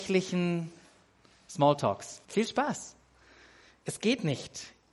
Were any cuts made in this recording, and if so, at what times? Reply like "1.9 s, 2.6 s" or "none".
2.2 s